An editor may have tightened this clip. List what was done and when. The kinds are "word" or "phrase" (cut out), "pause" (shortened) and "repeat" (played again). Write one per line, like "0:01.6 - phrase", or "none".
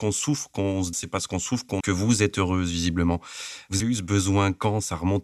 0:00.9 - word
0:01.8 - word
0:03.8 - word